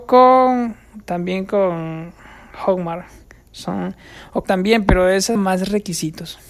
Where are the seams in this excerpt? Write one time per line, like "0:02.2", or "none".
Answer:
0:04.4
0:05.4